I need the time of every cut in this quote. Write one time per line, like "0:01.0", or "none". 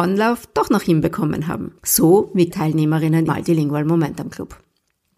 0:01.8
0:02.5
0:03.3

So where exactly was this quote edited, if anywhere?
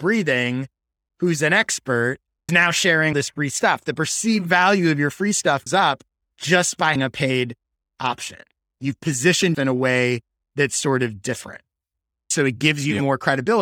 0:02.5
0:03.1
0:05.7
0:07.0
0:09.5

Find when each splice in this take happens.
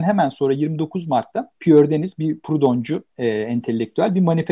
0:01.6
0:03.1

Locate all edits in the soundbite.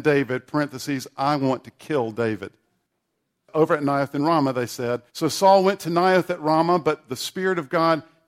0:05.1

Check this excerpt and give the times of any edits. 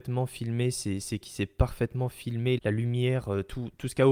0:01.2
0:02.6

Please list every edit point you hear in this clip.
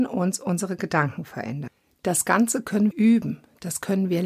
0:02.9

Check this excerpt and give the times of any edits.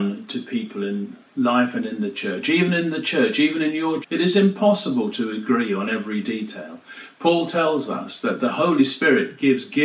0:04.0

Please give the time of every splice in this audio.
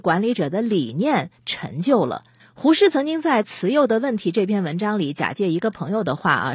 0:02.4

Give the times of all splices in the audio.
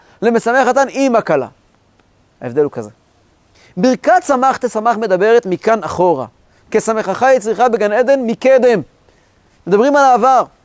none

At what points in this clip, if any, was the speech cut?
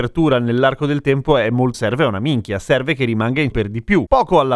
0:01.7
0:03.5

